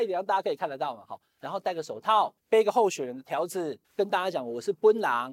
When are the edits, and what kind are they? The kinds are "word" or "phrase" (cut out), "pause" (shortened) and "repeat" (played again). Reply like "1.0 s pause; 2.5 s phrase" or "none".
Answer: 2.4 s pause; 3.8 s pause